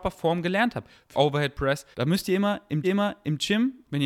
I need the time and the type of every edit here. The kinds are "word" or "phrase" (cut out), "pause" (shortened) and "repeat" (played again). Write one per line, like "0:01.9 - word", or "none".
0:01.1 - phrase
0:01.9 - pause
0:02.8 - repeat